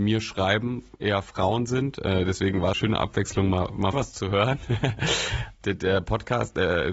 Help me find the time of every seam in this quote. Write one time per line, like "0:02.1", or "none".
0:02.7
0:03.9
0:05.6